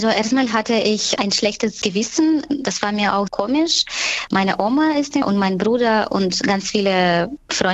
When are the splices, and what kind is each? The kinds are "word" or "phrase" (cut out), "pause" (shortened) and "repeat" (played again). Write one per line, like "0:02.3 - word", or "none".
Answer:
0:01.2 - word
0:03.3 - word
0:05.2 - word